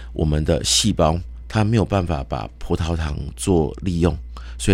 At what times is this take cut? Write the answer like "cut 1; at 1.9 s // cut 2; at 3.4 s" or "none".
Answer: none